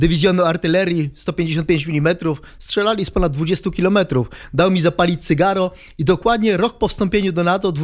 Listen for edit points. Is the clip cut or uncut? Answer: uncut